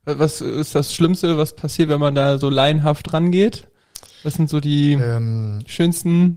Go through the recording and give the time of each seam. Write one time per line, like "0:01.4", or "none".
none